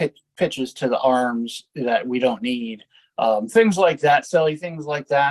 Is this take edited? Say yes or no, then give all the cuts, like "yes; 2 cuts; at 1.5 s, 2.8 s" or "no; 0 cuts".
no; 0 cuts